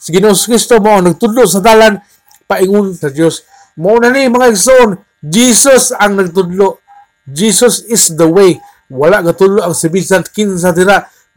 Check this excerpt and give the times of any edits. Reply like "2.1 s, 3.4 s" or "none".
3.0 s